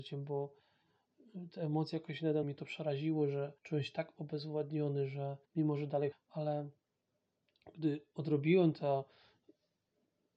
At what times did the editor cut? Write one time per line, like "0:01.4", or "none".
0:02.4
0:03.6
0:05.4
0:06.1